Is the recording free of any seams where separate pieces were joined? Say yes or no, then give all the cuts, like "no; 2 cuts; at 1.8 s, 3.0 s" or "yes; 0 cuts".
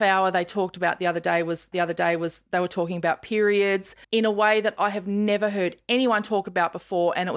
no; 2 cuts; at 1.7 s, 4.0 s